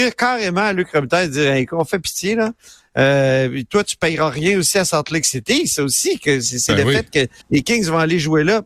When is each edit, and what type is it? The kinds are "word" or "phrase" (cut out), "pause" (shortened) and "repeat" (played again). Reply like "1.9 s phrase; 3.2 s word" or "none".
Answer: 7.4 s pause